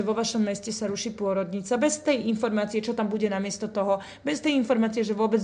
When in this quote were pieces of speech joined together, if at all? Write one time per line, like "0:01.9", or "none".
none